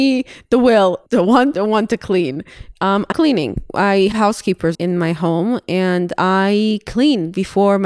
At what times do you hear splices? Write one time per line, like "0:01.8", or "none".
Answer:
0:01.1
0:01.5
0:03.1
0:04.1
0:04.7

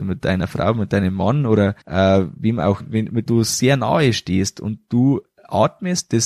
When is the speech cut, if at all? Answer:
0:01.8
0:02.8
0:03.3

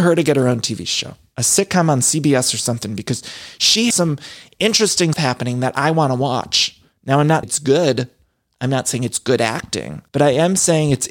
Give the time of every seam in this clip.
0:03.9
0:05.1
0:07.4
0:10.1

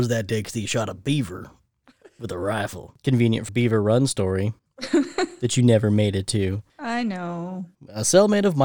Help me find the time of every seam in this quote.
0:03.5
0:04.6
0:07.7

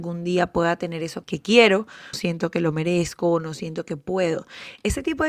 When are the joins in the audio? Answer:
0:01.2
0:02.1

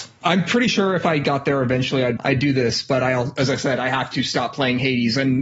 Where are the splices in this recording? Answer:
0:02.2

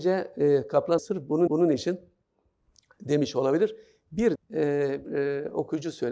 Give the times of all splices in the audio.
0:01.0
0:01.5
0:04.4
0:05.0

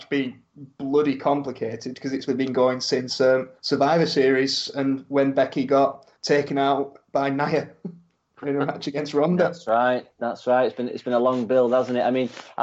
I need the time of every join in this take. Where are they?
0:02.3
0:03.6
0:06.1
0:08.4

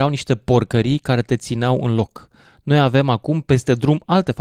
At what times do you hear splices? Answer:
none

